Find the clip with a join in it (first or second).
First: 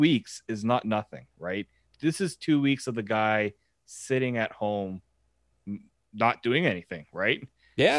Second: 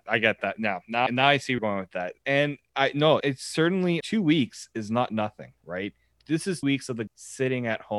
second